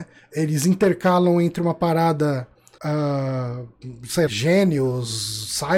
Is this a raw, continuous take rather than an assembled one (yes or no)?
no